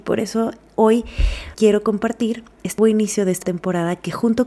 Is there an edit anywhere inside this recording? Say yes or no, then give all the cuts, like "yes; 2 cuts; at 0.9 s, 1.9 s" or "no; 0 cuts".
yes; 3 cuts; at 1.5 s, 2.8 s, 3.4 s